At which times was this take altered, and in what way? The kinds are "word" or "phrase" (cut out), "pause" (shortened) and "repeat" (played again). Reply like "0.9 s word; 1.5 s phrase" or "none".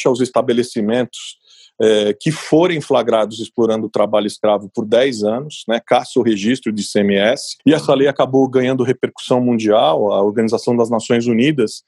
7.6 s pause